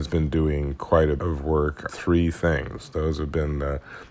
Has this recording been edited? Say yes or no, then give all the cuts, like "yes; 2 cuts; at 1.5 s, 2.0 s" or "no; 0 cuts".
yes; 2 cuts; at 1.2 s, 1.9 s